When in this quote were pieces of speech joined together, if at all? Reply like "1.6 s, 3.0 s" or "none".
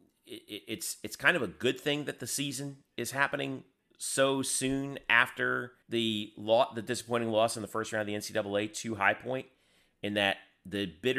5.8 s